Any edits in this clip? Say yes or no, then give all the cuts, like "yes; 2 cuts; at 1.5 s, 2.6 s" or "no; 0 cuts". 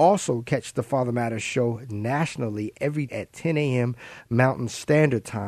yes; 1 cut; at 3.1 s